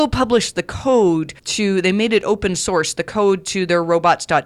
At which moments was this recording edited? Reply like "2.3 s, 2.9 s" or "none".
1.4 s